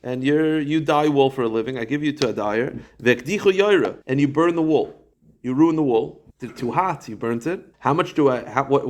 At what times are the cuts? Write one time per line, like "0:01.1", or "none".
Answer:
0:04.0
0:05.1
0:06.3
0:07.7